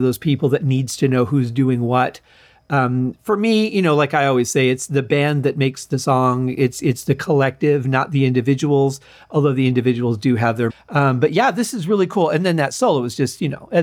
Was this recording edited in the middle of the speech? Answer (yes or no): yes